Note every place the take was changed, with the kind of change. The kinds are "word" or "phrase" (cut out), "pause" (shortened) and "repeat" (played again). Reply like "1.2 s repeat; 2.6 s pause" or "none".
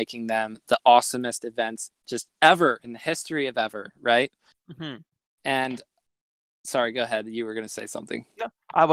none